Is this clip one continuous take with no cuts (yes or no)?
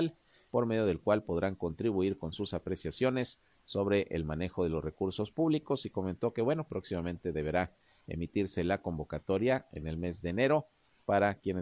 yes